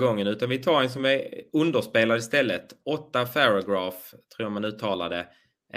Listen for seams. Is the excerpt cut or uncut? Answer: uncut